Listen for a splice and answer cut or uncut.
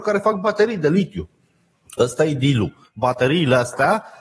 uncut